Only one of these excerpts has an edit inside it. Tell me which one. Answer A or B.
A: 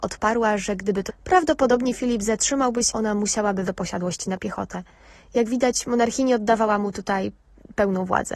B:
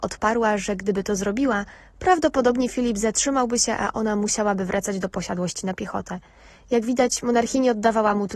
A